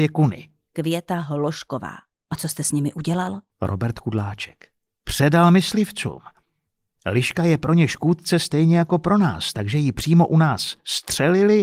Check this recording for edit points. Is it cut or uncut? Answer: uncut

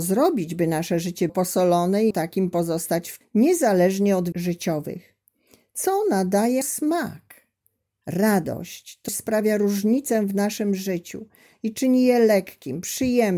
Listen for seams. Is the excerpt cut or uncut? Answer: cut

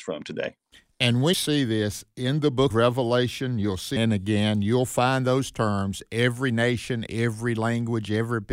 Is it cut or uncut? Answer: cut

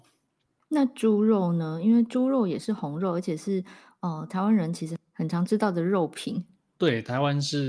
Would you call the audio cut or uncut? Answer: uncut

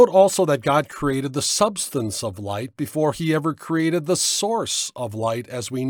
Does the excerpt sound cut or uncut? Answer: uncut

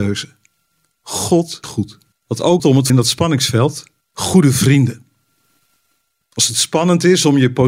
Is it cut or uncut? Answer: cut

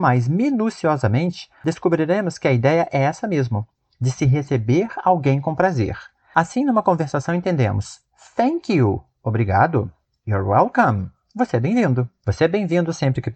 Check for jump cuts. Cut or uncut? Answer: uncut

